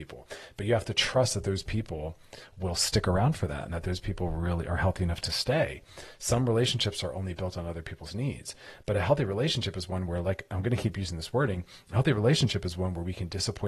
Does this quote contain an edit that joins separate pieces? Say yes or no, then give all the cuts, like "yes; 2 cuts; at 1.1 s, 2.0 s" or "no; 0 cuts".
no; 0 cuts